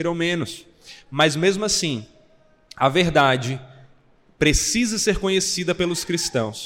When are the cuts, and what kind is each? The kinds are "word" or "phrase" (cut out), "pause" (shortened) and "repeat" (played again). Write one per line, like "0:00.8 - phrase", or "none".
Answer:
none